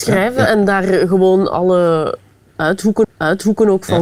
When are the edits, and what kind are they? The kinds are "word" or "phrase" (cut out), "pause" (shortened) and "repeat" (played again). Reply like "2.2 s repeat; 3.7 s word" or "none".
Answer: 3.0 s repeat